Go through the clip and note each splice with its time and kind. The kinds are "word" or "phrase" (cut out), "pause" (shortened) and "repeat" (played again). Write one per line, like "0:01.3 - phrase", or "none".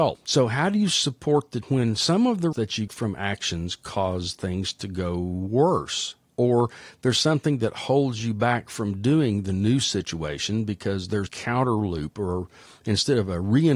0:01.6 - word
0:02.5 - word
0:02.9 - word
0:11.3 - word